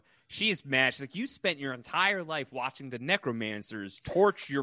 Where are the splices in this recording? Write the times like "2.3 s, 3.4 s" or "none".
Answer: none